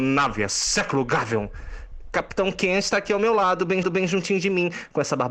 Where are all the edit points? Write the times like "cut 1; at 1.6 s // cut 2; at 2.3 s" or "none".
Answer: cut 1; at 3.8 s